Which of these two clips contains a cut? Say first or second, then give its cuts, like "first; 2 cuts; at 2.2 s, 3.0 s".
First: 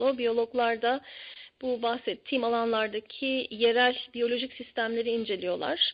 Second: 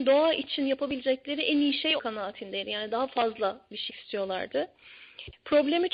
second; 2 cuts; at 2.0 s, 3.9 s